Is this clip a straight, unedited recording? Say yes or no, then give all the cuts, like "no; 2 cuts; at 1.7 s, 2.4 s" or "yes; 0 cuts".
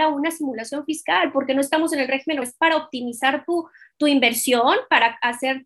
no; 1 cut; at 2.4 s